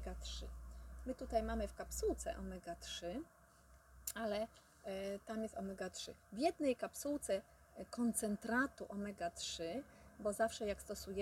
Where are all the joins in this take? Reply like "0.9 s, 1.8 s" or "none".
6.2 s